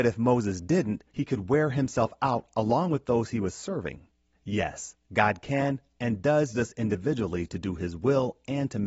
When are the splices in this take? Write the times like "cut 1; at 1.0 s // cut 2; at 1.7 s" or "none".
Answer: cut 1; at 1.1 s // cut 2; at 4.3 s // cut 3; at 6.5 s